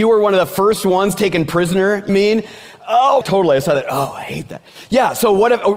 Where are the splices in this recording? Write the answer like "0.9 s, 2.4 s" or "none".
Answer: 2.1 s, 3.2 s